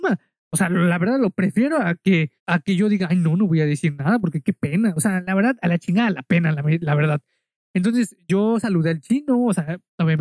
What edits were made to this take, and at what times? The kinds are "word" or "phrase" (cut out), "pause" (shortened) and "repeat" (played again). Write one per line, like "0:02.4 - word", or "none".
0:02.4 - pause